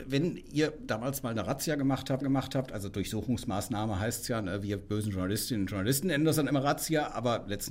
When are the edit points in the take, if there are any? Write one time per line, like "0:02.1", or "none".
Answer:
0:02.2